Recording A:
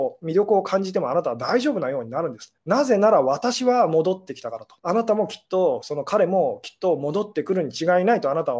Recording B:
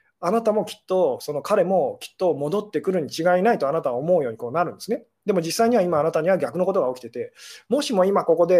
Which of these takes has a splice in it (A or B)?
A